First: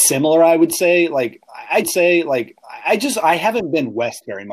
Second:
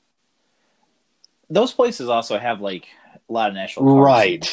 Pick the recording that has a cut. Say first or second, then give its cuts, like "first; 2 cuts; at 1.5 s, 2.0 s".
first; 1 cut; at 1.8 s